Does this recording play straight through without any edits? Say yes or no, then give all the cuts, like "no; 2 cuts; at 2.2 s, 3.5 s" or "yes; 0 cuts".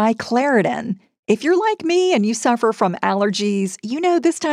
yes; 0 cuts